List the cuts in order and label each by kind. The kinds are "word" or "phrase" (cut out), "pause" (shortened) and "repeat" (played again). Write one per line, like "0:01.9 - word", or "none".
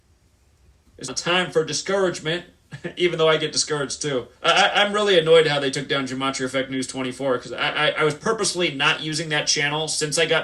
0:01.1 - word
0:04.4 - pause